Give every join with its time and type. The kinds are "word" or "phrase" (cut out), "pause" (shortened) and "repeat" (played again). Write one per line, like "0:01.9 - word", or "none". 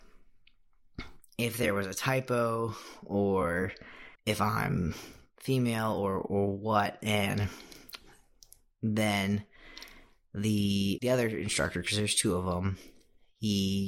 0:04.2 - pause
0:11.0 - word